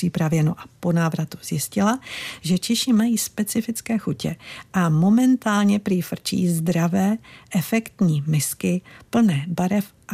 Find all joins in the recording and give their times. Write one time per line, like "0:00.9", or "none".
none